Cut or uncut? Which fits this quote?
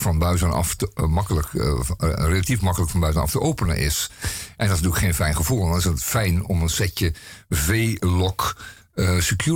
uncut